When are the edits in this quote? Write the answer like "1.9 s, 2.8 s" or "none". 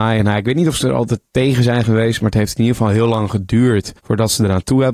4.0 s